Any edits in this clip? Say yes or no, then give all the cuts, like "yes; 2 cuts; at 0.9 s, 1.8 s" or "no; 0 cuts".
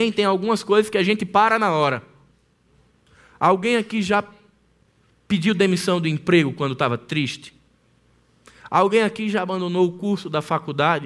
no; 0 cuts